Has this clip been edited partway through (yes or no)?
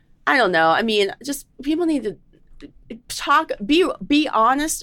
no